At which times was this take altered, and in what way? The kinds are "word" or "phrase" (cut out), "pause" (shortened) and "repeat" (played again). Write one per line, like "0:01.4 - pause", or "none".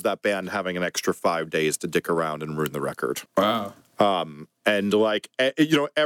0:03.3 - pause